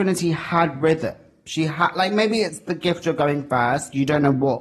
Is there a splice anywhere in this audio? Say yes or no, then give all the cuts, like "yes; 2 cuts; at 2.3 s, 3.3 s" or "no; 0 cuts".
no; 0 cuts